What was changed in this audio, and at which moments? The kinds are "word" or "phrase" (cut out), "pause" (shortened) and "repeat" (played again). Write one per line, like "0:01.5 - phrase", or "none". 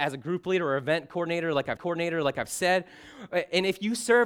0:01.8 - repeat